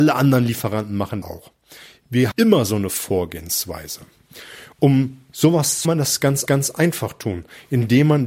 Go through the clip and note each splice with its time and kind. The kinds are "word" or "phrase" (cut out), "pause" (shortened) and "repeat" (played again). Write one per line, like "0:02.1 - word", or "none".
0:01.2 - word
0:02.3 - word
0:04.7 - pause
0:05.8 - phrase
0:06.5 - repeat

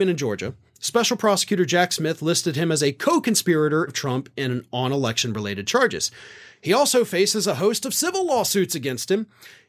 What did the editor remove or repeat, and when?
0:03.9 - phrase

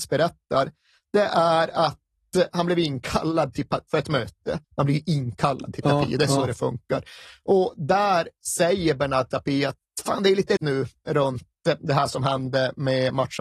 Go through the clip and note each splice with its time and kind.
0:03.9 - word
0:04.6 - pause
0:10.6 - word

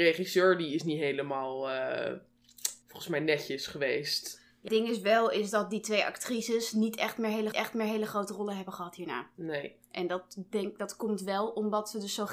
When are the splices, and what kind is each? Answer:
0:02.8 - pause
0:04.7 - word
0:07.5 - repeat

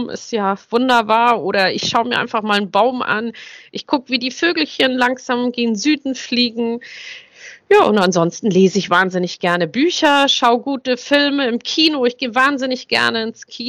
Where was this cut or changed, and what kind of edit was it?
none

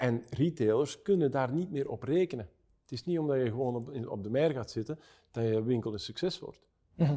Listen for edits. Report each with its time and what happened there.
none

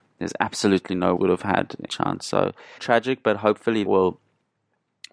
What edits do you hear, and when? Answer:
0:01.2 - word
0:01.9 - word
0:02.8 - word
0:03.9 - word

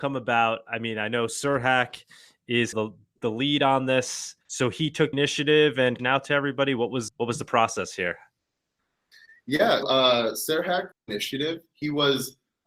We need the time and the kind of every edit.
0:01.3 - word
0:02.7 - phrase
0:04.4 - pause
0:05.1 - word
0:06.0 - phrase
0:07.1 - word
0:09.8 - word
0:10.9 - word

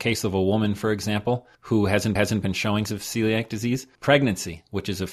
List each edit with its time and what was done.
0:01.5 - pause
0:02.2 - repeat
0:02.9 - word
0:04.0 - word

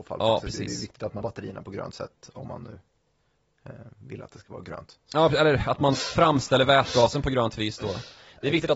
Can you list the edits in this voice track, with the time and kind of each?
0:01.2 - word

